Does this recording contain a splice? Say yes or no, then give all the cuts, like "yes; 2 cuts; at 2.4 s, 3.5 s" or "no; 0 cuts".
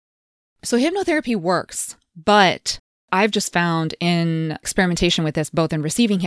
no; 0 cuts